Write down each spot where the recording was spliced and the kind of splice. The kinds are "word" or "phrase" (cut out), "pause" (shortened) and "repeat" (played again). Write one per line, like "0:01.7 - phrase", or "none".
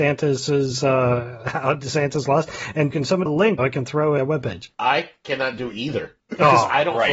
0:02.9 - word
0:03.3 - phrase
0:03.6 - word
0:04.2 - phrase
0:04.7 - pause
0:06.2 - pause